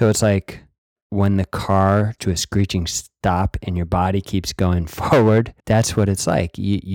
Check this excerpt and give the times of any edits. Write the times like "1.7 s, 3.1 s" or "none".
2.2 s, 5.6 s